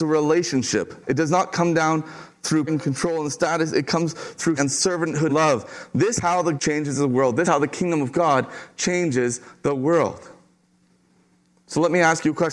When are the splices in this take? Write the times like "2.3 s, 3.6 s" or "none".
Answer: 1.0 s, 2.7 s, 4.6 s, 5.3 s, 6.2 s, 6.6 s, 7.4 s